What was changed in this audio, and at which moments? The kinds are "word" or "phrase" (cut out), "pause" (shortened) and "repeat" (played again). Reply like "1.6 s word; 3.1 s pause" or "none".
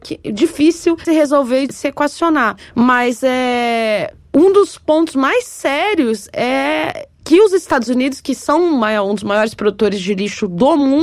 1.0 s phrase